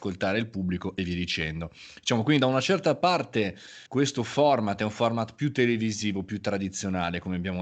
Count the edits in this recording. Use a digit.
1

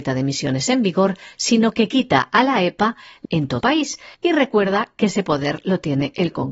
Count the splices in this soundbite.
3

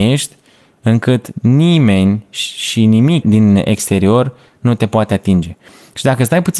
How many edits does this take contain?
1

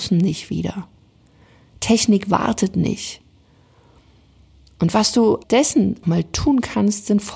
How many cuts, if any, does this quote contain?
2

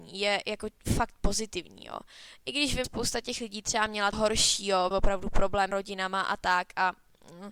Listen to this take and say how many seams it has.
4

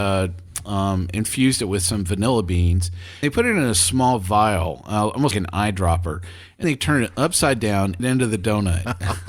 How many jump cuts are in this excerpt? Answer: 4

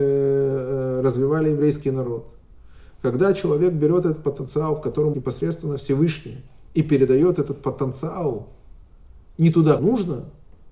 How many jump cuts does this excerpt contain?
3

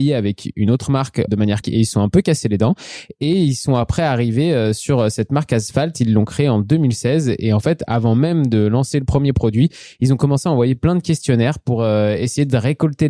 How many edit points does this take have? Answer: 2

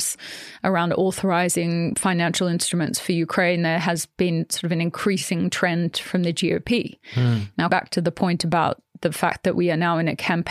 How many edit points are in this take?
2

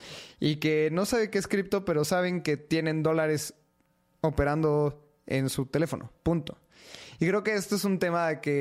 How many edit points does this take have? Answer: 0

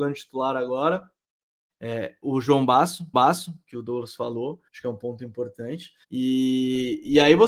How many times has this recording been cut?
4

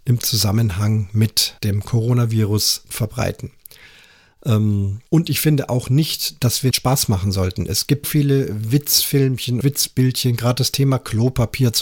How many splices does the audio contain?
6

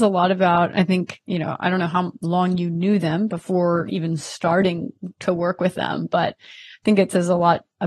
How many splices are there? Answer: 0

